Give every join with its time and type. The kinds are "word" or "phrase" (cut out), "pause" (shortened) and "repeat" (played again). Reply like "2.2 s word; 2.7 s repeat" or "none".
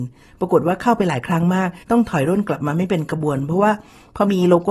1.8 s pause

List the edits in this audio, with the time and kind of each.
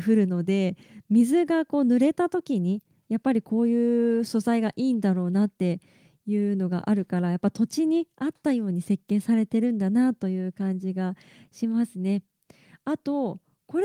none

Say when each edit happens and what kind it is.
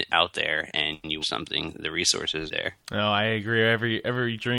1.2 s phrase; 2.5 s phrase; 2.8 s pause

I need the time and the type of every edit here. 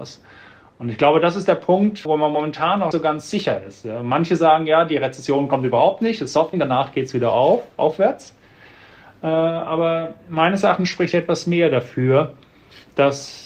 2.1 s word; 2.9 s word; 6.5 s word

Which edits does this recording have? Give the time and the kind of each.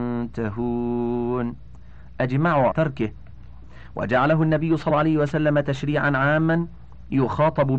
2.7 s word; 4.9 s word

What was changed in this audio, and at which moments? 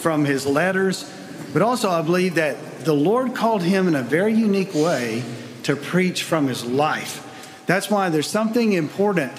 none

